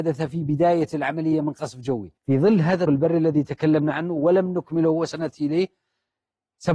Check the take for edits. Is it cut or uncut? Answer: cut